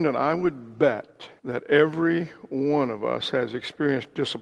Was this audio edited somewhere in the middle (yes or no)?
yes